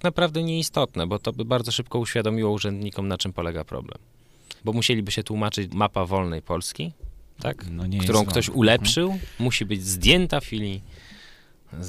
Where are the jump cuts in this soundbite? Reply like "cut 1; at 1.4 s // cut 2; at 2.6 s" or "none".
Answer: cut 1; at 4.6 s // cut 2; at 5.7 s // cut 3; at 7.3 s // cut 4; at 10.4 s